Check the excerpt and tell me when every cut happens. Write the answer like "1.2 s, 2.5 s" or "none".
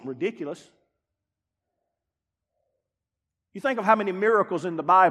none